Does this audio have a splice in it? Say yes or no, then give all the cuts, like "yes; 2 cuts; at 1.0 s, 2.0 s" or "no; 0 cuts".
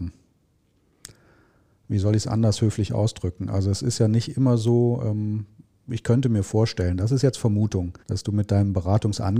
yes; 1 cut; at 8.0 s